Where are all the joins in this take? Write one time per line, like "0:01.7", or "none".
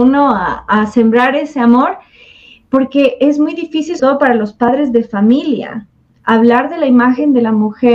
0:04.0